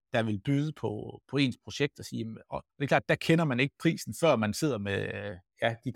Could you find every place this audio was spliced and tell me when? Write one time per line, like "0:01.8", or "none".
0:02.7